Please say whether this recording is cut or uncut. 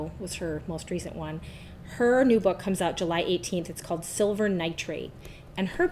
uncut